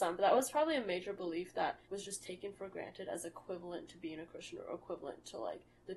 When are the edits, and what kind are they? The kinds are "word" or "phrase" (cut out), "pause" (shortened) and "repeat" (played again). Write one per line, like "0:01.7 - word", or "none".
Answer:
0:01.8 - pause

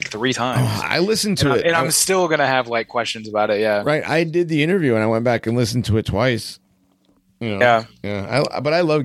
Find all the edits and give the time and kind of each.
none

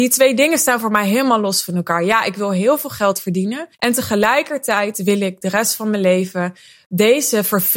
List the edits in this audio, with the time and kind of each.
0:03.7 - pause

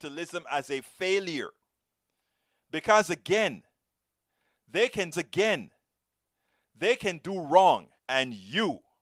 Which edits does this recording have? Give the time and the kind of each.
0:05.1 - repeat
0:08.0 - pause

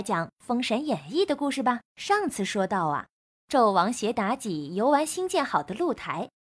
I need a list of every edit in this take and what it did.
0:01.8 - pause

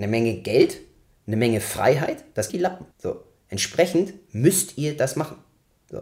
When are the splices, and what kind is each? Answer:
0:02.5 - phrase
0:02.9 - pause

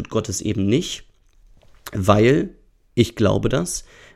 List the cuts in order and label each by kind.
none

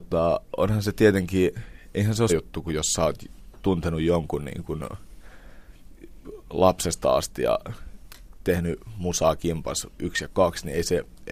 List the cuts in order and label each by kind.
0:02.3 - word
0:10.0 - word

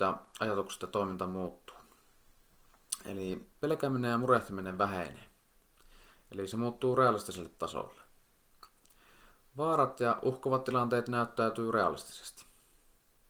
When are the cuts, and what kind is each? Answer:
none

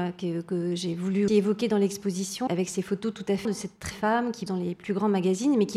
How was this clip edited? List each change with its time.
0:01.3 - word
0:02.5 - word
0:03.4 - word
0:03.9 - word
0:04.5 - word

